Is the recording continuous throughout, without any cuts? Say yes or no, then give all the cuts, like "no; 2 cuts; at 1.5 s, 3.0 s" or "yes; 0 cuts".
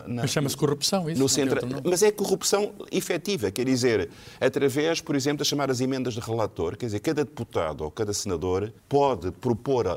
no; 1 cut; at 8.8 s